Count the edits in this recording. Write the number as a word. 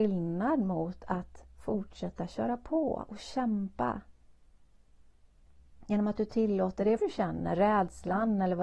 one